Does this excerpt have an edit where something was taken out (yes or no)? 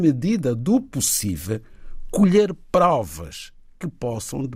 no